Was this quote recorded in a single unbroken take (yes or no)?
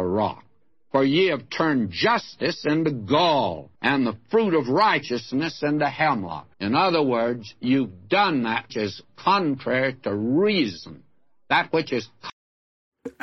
no